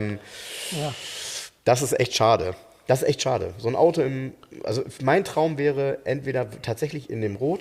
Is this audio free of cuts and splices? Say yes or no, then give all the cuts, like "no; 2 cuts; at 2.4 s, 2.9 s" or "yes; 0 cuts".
yes; 0 cuts